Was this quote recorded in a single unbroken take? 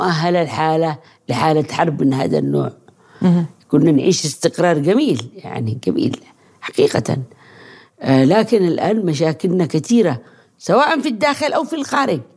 yes; 0 cuts

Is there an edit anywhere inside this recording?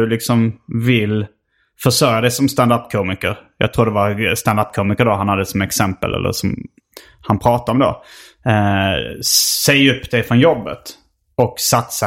no; 0 cuts

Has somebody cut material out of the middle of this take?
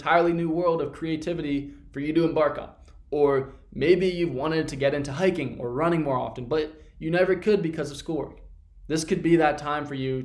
no; 0 cuts

